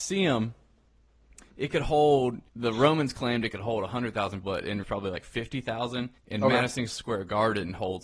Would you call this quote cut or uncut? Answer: cut